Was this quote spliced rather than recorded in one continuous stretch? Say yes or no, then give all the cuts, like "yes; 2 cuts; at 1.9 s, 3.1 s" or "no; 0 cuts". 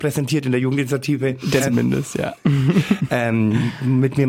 yes; 1 cut; at 1.6 s